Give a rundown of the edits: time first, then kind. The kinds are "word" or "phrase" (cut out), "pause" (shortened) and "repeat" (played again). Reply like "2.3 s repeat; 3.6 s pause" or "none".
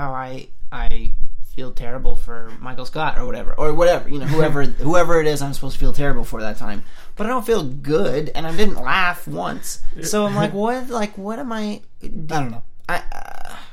12.3 s phrase